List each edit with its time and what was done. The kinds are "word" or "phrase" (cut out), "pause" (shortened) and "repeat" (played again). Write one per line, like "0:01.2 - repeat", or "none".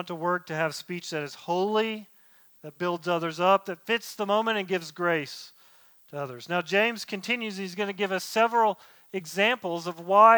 none